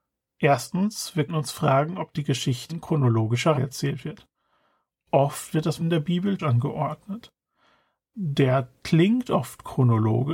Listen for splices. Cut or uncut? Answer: cut